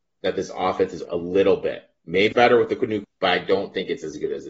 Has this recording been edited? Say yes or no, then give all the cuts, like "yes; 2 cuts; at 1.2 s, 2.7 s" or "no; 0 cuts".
yes; 3 cuts; at 1.0 s, 2.3 s, 3.0 s